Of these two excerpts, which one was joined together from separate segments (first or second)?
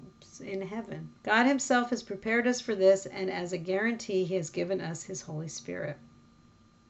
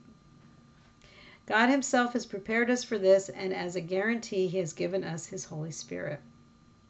first